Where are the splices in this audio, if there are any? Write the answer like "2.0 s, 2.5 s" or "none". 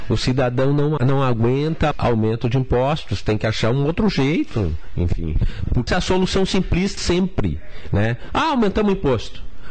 1.0 s, 1.9 s, 5.9 s, 7.0 s